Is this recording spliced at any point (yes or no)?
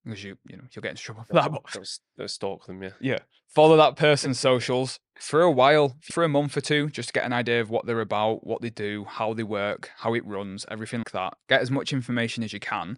yes